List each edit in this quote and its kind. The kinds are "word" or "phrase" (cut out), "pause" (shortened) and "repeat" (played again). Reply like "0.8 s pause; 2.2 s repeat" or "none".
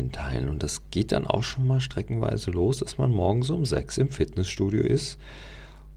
none